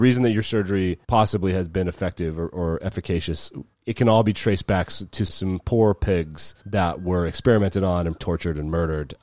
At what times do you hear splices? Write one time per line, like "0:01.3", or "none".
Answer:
0:01.0
0:03.7
0:05.3
0:06.6
0:08.2